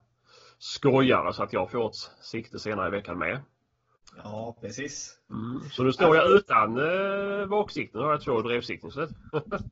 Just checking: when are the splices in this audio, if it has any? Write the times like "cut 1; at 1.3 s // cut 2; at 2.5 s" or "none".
none

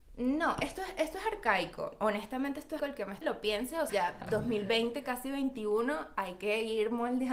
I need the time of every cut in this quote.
cut 1; at 2.8 s // cut 2; at 3.2 s // cut 3; at 3.9 s

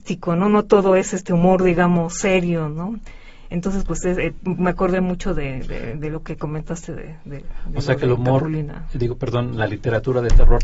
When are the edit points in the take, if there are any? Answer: none

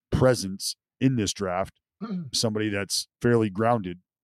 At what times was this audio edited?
cut 1; at 2.3 s // cut 2; at 3.1 s

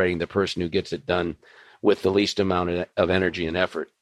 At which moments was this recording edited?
none

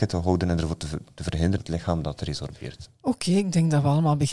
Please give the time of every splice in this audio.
cut 1; at 1.6 s

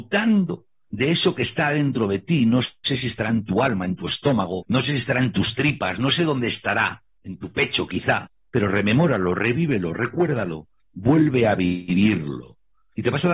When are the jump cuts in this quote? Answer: none

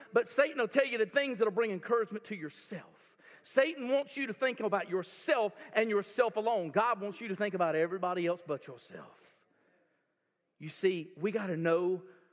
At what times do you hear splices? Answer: cut 1; at 1.1 s

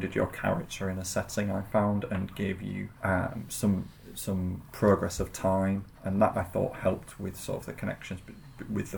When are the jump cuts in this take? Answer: cut 1; at 3.0 s // cut 2; at 5.9 s // cut 3; at 6.3 s

